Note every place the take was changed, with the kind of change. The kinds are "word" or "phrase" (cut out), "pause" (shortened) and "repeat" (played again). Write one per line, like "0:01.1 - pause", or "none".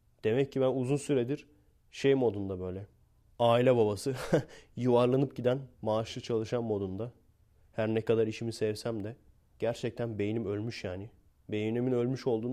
0:05.7 - pause